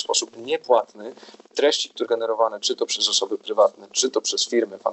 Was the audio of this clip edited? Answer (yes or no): yes